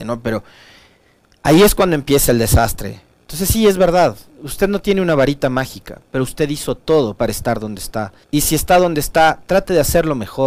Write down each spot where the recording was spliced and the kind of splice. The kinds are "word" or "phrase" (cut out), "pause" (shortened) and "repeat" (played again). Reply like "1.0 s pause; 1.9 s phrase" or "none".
8.2 s pause